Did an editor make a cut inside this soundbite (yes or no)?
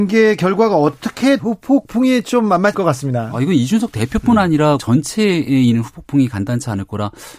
yes